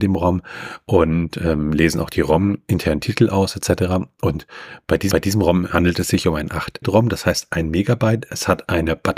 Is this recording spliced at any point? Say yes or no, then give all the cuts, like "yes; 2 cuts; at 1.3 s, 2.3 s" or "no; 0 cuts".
yes; 2 cuts; at 5.1 s, 6.8 s